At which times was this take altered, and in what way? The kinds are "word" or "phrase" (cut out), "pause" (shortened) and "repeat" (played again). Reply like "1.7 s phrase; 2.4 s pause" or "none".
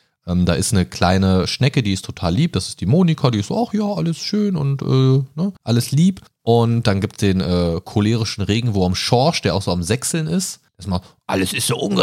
5.6 s pause; 6.3 s pause; 10.7 s pause